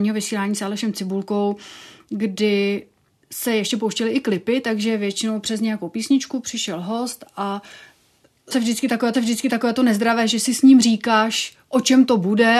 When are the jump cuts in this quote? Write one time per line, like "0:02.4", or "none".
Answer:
0:03.1
0:08.5
0:09.1

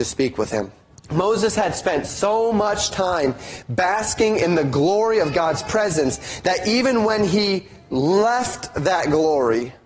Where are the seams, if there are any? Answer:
0:00.9

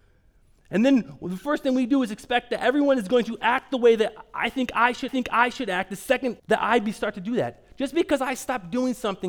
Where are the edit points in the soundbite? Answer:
0:05.1
0:06.4

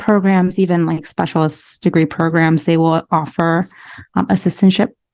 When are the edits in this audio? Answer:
none

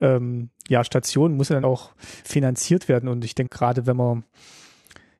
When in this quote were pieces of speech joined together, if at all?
0:01.6
0:02.2
0:03.5

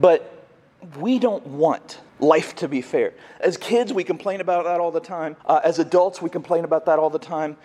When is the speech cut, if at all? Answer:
0:02.1
0:05.4

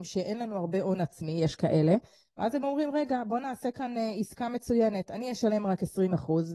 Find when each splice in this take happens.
none

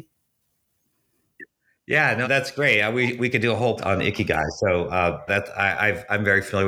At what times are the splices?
0:02.2
0:03.8
0:05.3

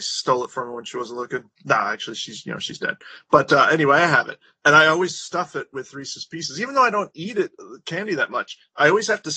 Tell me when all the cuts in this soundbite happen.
0:01.5

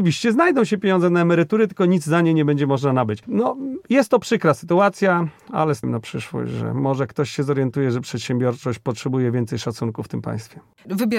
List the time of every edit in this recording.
0:05.8

